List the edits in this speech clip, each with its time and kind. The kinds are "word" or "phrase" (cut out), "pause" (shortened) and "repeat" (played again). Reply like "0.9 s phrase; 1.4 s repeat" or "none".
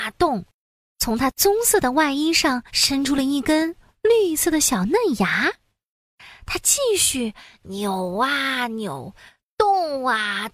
2.7 s pause